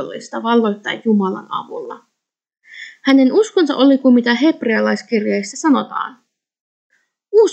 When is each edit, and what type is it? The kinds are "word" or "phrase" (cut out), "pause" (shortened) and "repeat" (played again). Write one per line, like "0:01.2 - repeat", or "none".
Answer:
none